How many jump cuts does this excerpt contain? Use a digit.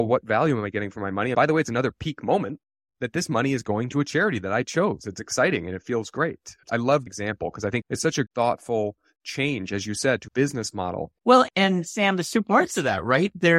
6